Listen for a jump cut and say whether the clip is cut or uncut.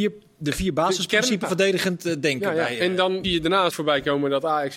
cut